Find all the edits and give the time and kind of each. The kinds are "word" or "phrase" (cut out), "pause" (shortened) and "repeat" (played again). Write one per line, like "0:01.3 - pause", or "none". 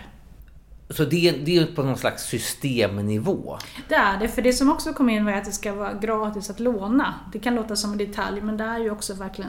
none